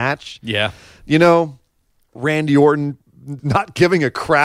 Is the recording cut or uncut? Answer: cut